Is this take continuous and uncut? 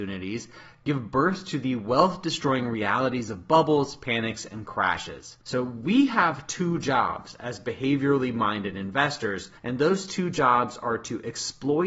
no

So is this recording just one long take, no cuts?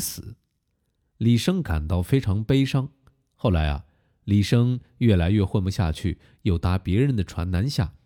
yes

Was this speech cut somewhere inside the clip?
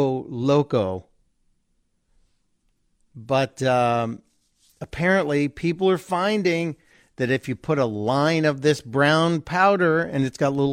no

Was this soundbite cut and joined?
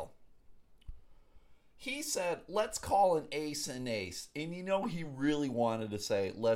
no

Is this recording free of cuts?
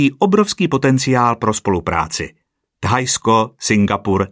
yes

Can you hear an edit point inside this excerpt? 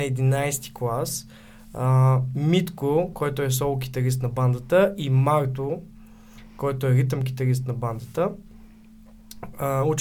no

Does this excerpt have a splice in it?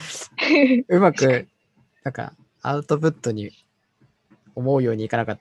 no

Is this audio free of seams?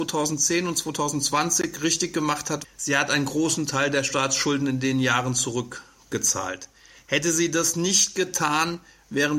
no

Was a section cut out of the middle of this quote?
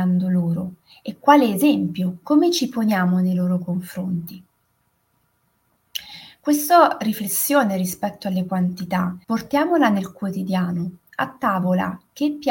yes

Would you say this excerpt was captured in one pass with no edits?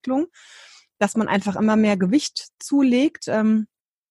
yes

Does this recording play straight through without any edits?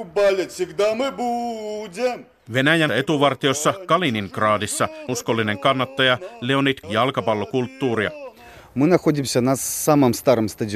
no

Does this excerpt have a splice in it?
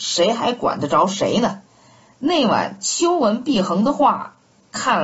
yes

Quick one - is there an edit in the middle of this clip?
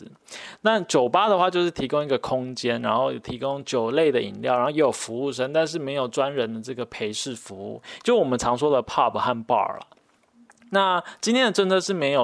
no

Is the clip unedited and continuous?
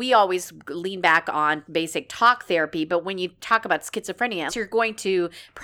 no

